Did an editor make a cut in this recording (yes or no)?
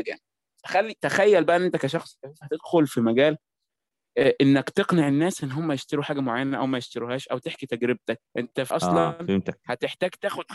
yes